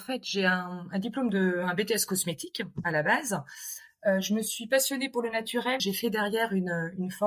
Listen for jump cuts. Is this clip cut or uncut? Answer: cut